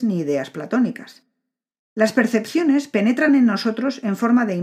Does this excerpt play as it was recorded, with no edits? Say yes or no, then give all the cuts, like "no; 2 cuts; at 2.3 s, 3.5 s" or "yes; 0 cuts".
yes; 0 cuts